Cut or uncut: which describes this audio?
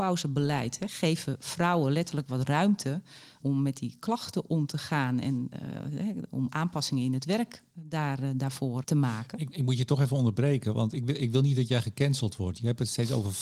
cut